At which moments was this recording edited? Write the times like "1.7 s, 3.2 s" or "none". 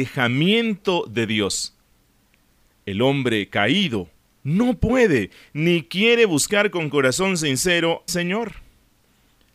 8.1 s